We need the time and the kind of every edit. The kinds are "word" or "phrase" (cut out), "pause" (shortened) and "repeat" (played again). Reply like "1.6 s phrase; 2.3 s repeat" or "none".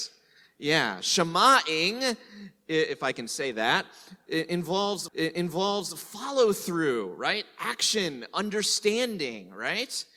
5.1 s repeat

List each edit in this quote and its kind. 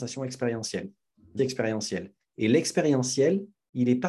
1.4 s word

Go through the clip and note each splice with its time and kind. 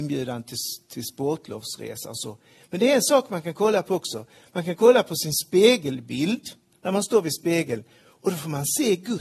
none

